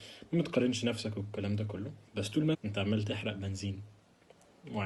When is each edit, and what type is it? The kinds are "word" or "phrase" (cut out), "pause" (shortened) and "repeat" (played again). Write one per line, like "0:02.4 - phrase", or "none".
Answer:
0:02.1 - pause
0:02.5 - phrase